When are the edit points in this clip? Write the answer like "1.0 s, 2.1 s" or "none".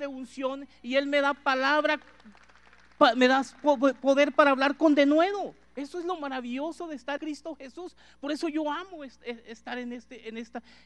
5.6 s, 7.2 s